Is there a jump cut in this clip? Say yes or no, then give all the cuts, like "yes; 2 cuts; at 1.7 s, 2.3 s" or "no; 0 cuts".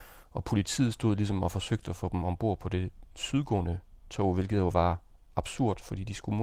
no; 0 cuts